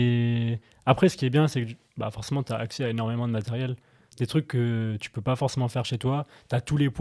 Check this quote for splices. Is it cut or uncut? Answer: uncut